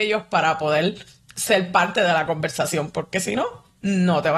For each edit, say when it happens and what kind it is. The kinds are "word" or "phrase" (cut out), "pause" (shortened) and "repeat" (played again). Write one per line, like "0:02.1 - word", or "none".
none

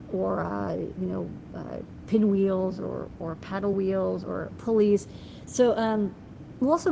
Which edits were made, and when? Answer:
none

